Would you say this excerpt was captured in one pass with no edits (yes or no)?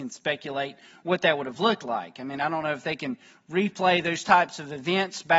yes